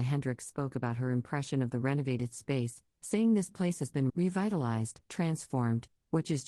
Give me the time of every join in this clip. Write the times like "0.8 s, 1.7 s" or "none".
4.1 s, 5.0 s

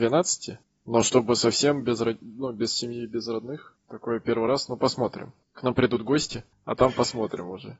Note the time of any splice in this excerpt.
none

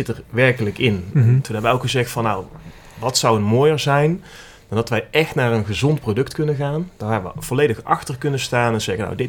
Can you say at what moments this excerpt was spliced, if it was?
none

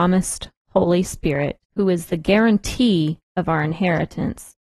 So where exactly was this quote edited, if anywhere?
1.6 s

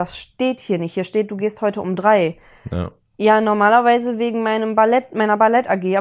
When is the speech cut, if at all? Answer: none

